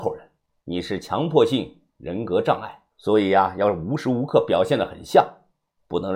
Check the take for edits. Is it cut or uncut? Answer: cut